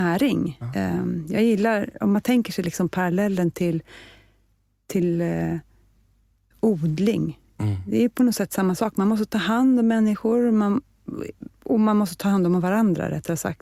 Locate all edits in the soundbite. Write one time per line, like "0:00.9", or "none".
none